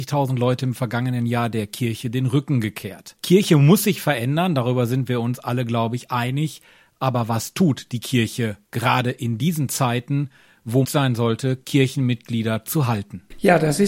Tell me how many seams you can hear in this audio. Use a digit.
1